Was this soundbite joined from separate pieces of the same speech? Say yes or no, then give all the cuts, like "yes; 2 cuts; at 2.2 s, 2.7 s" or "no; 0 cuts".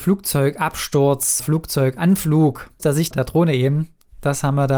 yes; 3 cuts; at 1.4 s, 2.8 s, 3.1 s